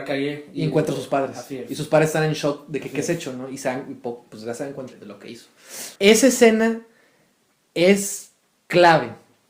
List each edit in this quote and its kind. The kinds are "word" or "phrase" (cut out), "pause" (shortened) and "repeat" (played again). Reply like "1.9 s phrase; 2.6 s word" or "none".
4.9 s word; 6.0 s pause